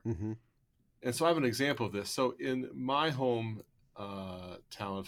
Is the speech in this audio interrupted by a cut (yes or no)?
no